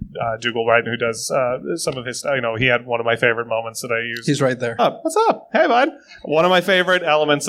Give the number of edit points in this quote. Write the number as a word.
one